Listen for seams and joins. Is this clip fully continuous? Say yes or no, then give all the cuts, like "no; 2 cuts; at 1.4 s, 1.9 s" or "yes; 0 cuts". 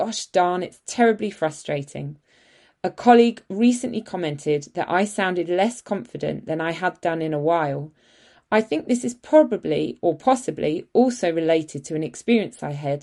yes; 0 cuts